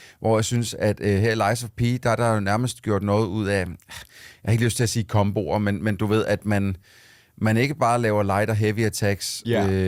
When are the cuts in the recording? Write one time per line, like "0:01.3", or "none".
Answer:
none